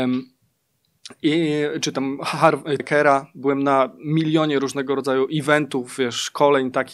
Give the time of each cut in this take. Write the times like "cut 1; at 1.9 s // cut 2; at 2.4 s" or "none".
cut 1; at 2.8 s